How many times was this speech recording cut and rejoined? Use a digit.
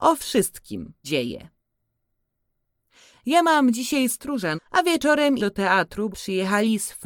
5